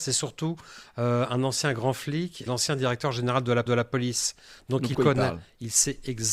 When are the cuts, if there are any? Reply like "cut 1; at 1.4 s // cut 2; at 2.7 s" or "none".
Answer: cut 1; at 2.5 s // cut 2; at 3.7 s // cut 3; at 4.9 s